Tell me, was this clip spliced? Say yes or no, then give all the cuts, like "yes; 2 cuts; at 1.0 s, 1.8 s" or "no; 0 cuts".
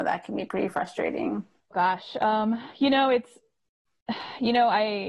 yes; 1 cut; at 1.7 s